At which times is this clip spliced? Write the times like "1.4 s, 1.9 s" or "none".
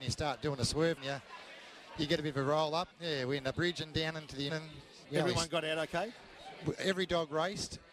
1.0 s, 2.9 s, 3.5 s, 4.5 s, 5.0 s